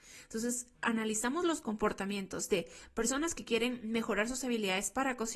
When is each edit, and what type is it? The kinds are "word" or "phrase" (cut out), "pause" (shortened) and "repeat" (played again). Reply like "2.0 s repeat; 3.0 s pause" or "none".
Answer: none